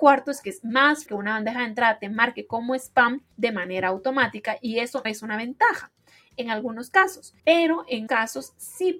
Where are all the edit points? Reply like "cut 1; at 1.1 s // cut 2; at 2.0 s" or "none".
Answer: cut 1; at 1.1 s // cut 2; at 3.3 s // cut 3; at 5.0 s // cut 4; at 7.4 s // cut 5; at 8.1 s